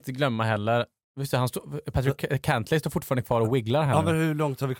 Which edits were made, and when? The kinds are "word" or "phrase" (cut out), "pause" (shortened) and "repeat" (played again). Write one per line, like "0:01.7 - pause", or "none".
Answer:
none